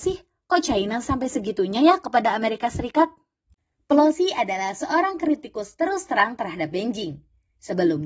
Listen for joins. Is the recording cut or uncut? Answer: uncut